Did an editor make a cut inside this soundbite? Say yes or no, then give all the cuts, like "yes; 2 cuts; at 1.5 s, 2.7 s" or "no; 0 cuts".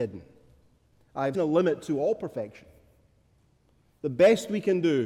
yes; 1 cut; at 1.3 s